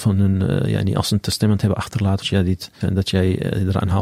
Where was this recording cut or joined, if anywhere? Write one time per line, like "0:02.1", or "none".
0:02.2
0:02.8